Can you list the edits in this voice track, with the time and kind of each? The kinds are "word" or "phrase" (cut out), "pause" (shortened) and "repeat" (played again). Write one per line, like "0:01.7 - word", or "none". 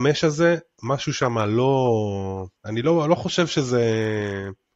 0:02.6 - pause